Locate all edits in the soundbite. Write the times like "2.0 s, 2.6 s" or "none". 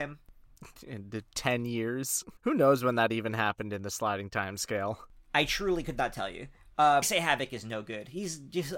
2.4 s, 7.0 s